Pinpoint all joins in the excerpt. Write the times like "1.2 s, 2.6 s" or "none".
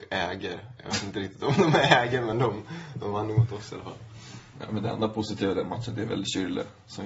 none